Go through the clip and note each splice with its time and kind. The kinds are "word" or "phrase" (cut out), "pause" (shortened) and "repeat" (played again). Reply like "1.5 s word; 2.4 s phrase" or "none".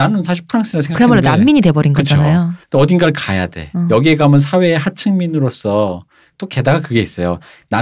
none